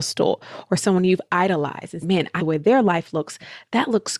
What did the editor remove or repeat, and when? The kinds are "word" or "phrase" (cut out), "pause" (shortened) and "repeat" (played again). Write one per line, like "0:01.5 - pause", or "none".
0:02.0 - word
0:02.4 - word